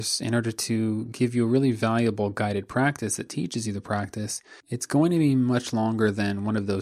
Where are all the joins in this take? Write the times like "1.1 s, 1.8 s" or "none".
4.6 s